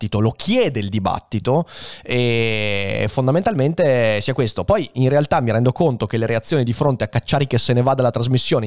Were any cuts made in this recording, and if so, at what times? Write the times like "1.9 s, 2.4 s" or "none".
none

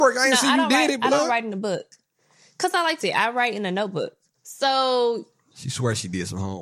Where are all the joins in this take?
3.0 s, 4.3 s

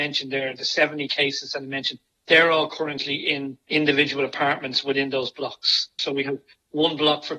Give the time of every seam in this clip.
none

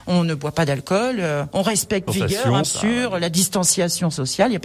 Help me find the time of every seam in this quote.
2.1 s, 2.6 s

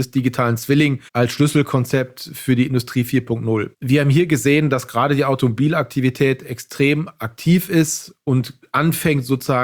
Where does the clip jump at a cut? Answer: 1.1 s, 3.7 s

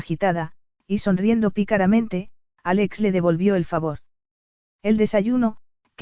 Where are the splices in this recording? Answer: none

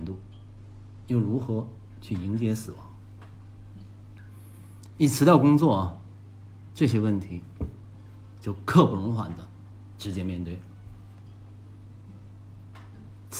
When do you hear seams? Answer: 1.0 s

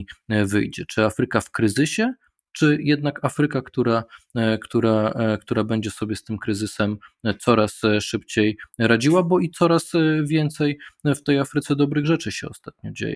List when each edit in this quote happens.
none

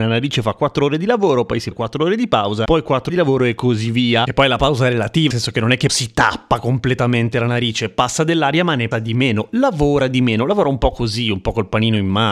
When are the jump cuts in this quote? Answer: 1.7 s, 3.1 s, 5.3 s, 5.9 s, 8.9 s

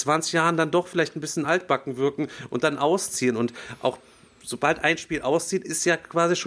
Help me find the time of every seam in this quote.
none

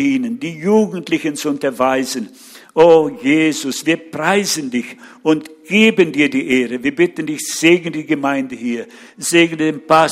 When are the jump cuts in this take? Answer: none

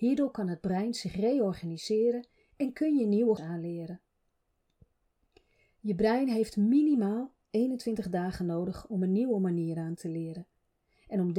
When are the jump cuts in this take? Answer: 3.4 s

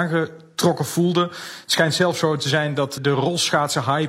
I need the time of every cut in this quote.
3.0 s

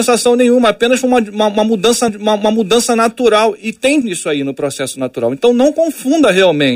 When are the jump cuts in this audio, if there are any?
2.1 s, 4.0 s

